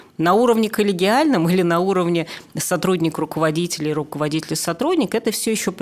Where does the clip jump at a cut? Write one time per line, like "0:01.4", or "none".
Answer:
none